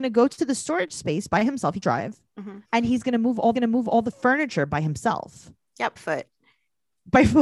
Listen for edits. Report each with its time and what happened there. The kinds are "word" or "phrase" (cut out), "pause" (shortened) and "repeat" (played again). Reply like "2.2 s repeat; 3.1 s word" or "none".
1.8 s word; 2.6 s pause; 3.5 s repeat; 6.0 s phrase